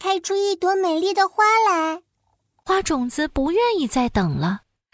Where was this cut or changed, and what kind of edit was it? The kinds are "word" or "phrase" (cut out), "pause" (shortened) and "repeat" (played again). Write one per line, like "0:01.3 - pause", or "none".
none